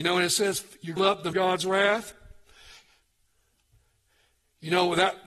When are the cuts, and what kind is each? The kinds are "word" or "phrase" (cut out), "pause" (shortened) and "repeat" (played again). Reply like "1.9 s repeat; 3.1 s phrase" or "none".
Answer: 1.0 s phrase; 1.3 s phrase